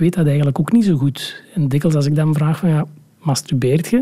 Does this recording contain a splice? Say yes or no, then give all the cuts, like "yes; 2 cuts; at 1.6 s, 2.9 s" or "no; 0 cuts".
no; 0 cuts